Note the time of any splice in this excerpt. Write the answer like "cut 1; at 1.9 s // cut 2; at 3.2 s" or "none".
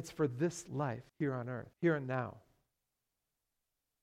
cut 1; at 1.1 s // cut 2; at 1.7 s